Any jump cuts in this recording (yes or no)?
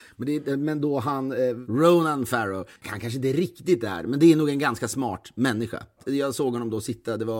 yes